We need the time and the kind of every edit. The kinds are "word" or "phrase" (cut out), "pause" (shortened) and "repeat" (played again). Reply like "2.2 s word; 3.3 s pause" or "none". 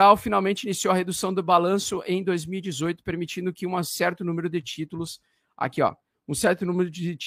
none

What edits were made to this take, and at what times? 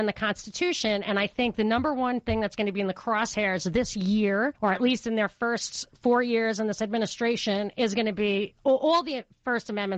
4.6 s pause

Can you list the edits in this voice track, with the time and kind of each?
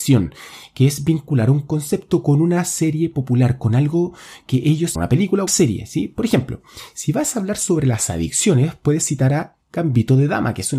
4.9 s phrase; 5.5 s phrase

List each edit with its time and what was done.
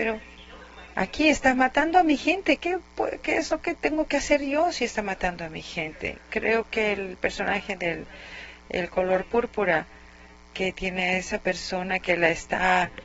none

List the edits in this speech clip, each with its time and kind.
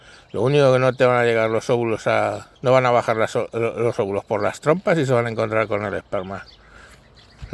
2.6 s pause

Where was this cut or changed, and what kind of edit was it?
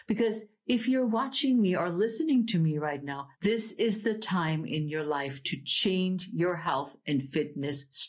3.3 s pause

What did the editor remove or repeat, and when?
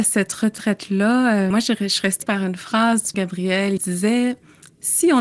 1.5 s word; 2.2 s word; 3.1 s word; 3.8 s word

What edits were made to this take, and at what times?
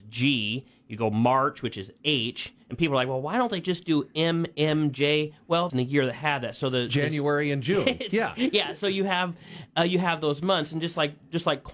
2.6 s pause; 5.7 s phrase

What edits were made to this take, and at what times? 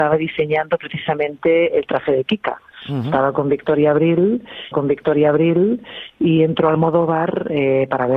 4.7 s repeat

